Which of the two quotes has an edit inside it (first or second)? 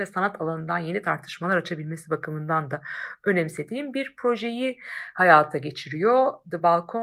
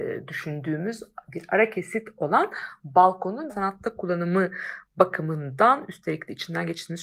second